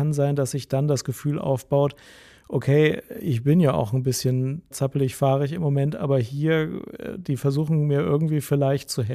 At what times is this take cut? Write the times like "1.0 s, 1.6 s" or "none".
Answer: 4.7 s